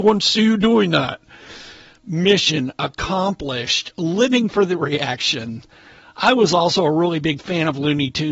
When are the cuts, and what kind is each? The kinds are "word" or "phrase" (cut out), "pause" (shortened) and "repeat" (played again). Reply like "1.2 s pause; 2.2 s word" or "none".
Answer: none